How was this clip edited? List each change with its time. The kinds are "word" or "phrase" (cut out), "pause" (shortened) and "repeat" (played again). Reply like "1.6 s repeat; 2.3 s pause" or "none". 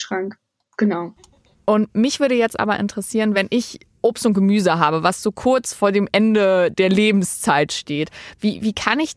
none